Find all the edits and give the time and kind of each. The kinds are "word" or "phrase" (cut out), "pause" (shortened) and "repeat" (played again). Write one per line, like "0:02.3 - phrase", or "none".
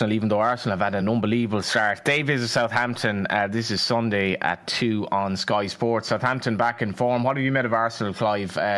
none